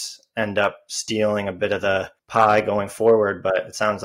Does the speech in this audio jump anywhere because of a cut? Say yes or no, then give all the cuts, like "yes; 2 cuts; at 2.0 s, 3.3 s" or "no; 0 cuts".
yes; 1 cut; at 2.2 s